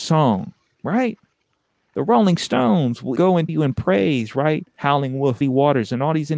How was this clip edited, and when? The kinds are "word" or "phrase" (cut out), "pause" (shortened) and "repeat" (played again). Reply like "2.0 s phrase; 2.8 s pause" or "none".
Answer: 3.2 s word; 3.5 s word; 5.4 s word